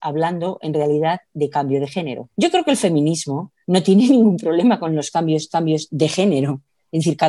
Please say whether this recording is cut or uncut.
cut